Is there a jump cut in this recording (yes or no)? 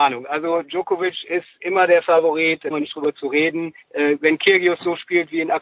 yes